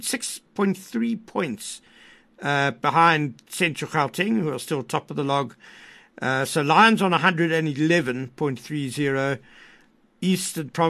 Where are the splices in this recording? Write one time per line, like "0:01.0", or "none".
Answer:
none